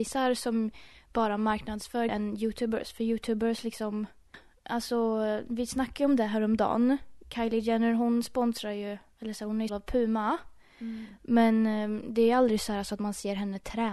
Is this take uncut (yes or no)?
no